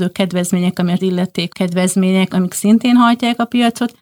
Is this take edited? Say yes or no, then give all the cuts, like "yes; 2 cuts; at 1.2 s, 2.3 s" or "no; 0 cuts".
yes; 3 cuts; at 1.0 s, 1.5 s, 2.3 s